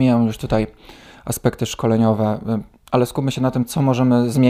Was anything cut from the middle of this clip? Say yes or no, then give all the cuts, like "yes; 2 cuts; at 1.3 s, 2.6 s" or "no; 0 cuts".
no; 0 cuts